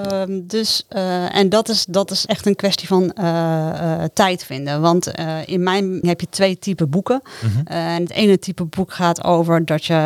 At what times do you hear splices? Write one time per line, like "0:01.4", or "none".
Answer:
0:02.3
0:06.0